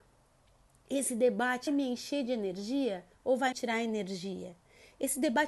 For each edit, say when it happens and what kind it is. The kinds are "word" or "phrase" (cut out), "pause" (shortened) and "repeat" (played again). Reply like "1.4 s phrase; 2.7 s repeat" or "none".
1.7 s word; 3.1 s pause; 3.5 s word

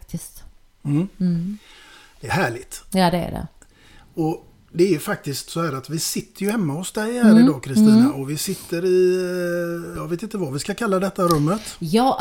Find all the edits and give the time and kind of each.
none

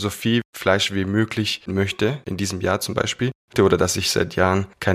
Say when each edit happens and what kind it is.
1.7 s word

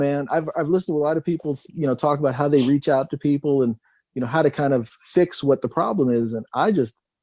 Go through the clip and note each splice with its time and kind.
none

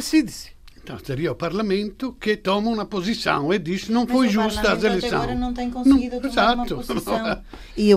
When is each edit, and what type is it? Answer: none

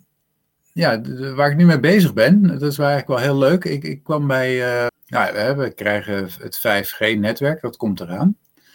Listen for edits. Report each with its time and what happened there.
4.9 s word

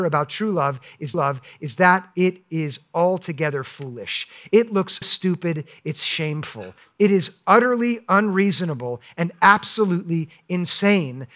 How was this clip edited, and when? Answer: 1.1 s repeat; 5.0 s word

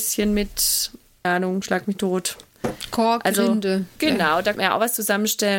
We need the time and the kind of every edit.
1.2 s word; 4.0 s word; 4.5 s word

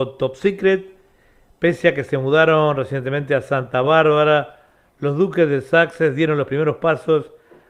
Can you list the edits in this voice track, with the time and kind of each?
none

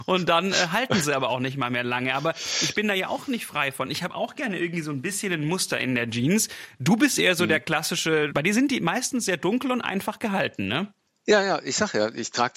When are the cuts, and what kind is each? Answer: none

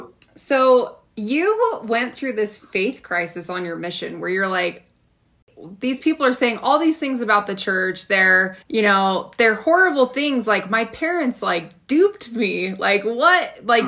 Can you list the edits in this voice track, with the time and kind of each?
8.6 s pause

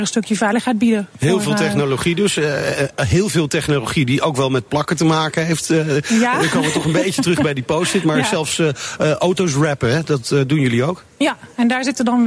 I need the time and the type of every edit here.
none

